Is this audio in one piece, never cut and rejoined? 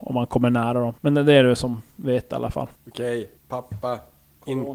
no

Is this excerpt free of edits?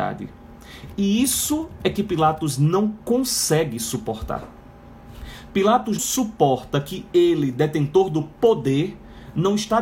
no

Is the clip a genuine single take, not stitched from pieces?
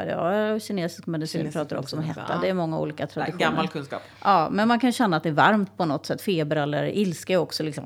yes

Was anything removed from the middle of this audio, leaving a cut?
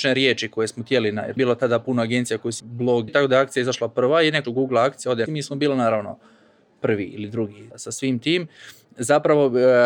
yes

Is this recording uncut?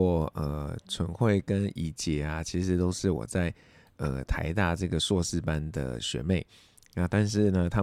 yes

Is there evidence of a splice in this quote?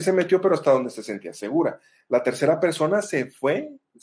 no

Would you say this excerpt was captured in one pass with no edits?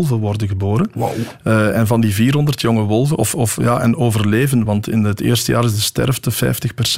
yes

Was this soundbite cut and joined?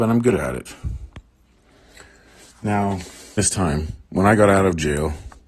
yes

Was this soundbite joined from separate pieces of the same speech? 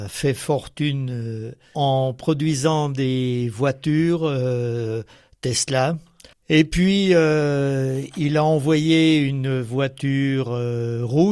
yes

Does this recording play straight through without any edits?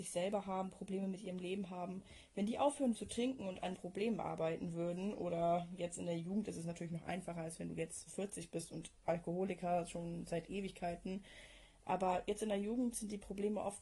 no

